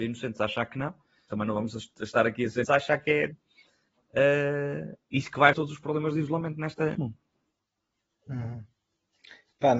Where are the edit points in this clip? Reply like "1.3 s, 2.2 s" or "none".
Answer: 1.3 s, 2.6 s, 3.3 s, 5.5 s, 6.9 s